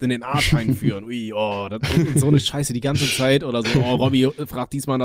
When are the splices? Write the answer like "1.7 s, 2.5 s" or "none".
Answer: none